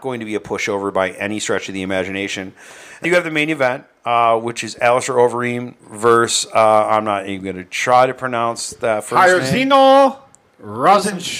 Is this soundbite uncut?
no; 2 cuts; at 3.0 s, 5.8 s

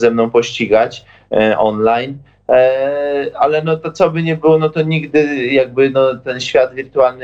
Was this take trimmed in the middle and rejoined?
no; 0 cuts

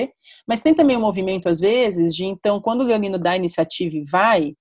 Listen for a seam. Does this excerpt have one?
no; 0 cuts

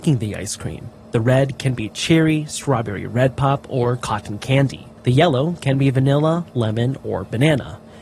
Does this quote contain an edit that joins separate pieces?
yes; 2 cuts; at 1.0 s, 5.0 s

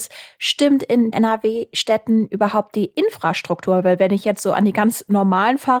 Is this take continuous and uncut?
no; 1 cut; at 1.1 s

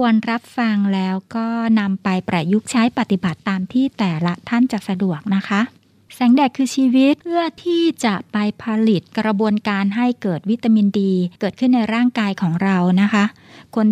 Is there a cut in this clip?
yes; 2 cuts; at 7.2 s, 11.3 s

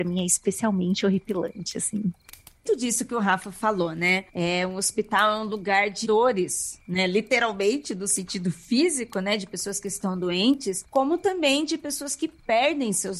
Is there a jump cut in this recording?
yes; 4 cuts; at 2.7 s, 4.3 s, 6.0 s, 10.9 s

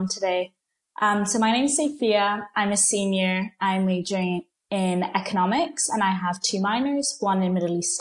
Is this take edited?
no; 0 cuts

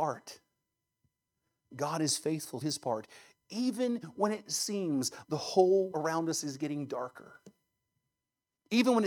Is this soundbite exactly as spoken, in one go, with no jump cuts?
no; 3 cuts; at 2.6 s, 5.2 s, 5.9 s

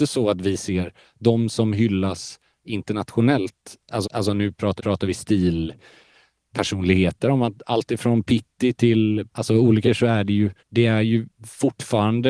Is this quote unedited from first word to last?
no; 5 cuts; at 4.0 s, 4.8 s, 9.3 s, 9.8 s, 10.6 s

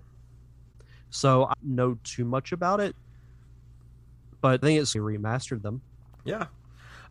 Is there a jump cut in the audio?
yes; 3 cuts; at 1.5 s, 4.6 s, 4.9 s

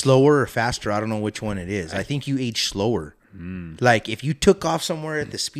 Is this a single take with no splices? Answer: no; 1 cut; at 3.2 s

